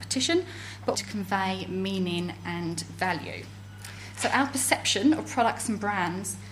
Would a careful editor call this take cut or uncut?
cut